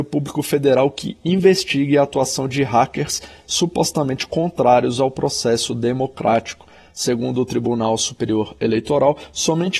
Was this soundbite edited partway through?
no; 0 cuts

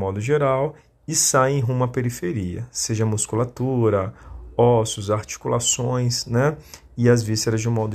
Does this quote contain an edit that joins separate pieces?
no; 0 cuts

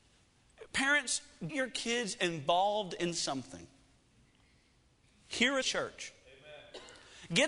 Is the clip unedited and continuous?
no; 2 cuts; at 1.5 s, 5.6 s

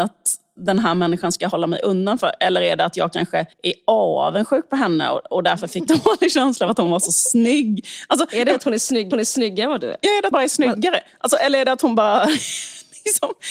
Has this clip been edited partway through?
yes; 4 cuts; at 3.5 s, 5.9 s, 9.1 s, 10.3 s

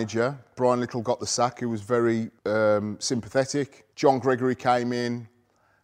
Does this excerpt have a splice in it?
yes; 2 cuts; at 2.4 s, 3.9 s

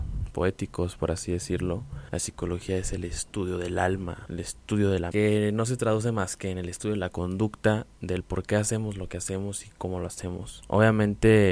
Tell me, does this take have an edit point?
yes; 1 cut; at 5.1 s

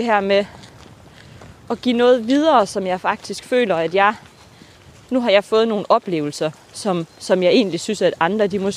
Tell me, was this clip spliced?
no; 0 cuts

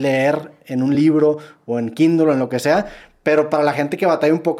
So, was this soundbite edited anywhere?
no; 0 cuts

